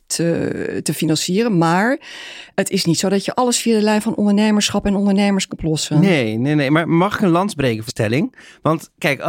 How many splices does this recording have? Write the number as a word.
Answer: three